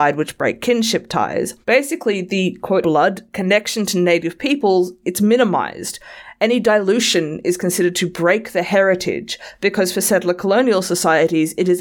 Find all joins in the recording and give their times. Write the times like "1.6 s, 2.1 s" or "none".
1.6 s, 2.8 s